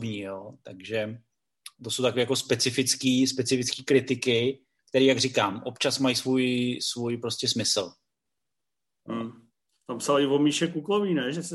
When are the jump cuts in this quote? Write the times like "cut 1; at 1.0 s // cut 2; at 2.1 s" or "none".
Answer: none